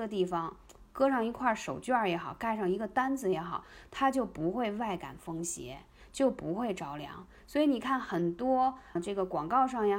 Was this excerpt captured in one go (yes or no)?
no